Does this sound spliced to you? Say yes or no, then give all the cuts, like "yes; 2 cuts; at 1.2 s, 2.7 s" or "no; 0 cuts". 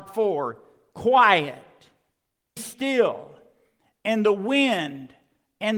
yes; 1 cut; at 2.6 s